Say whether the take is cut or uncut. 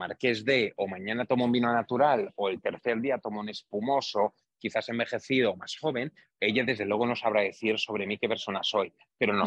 uncut